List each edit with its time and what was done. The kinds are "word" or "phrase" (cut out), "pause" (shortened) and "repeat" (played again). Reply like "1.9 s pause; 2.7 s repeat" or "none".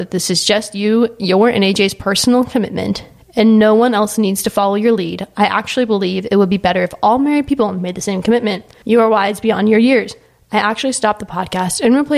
none